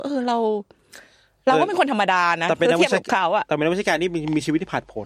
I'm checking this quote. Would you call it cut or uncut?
uncut